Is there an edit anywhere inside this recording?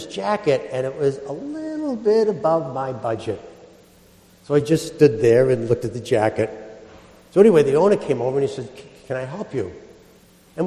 no; 0 cuts

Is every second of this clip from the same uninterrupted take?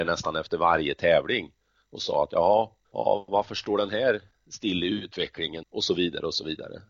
no; 2 cuts; at 2.8 s, 5.6 s

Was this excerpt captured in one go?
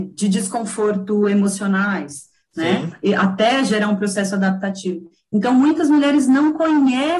yes; 0 cuts

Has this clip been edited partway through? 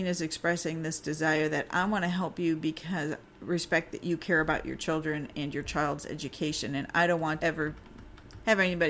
yes; 2 cuts; at 3.2 s, 7.4 s

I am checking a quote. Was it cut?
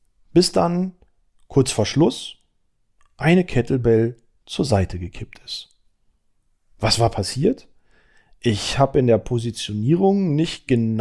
no; 0 cuts

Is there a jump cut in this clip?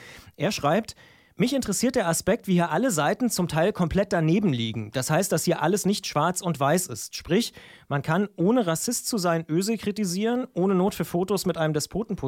no; 0 cuts

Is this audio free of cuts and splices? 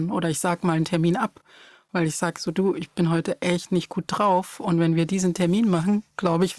yes; 0 cuts

